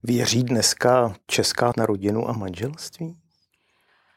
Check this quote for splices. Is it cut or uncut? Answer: cut